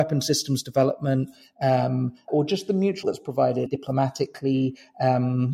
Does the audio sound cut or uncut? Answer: cut